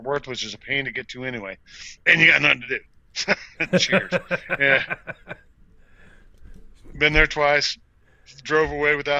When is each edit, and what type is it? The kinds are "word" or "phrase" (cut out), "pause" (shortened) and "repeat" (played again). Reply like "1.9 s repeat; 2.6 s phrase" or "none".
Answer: 2.0 s pause